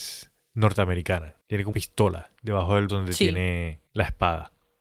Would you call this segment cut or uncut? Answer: cut